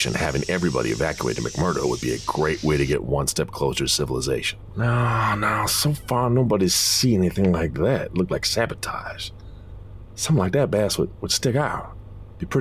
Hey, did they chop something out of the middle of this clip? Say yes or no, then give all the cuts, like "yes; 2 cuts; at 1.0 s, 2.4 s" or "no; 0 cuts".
no; 0 cuts